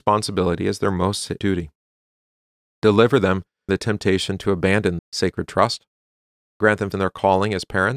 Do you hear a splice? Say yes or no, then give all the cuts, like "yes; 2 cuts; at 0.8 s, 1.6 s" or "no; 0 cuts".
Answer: yes; 4 cuts; at 1.4 s, 3.7 s, 5.0 s, 6.9 s